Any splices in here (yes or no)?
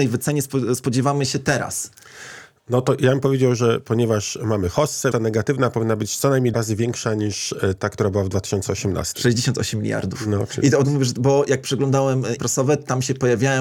yes